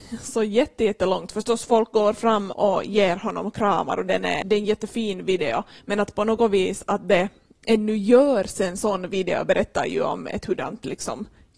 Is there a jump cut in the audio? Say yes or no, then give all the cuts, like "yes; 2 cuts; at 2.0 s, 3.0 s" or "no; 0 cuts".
yes; 2 cuts; at 2.5 s, 4.4 s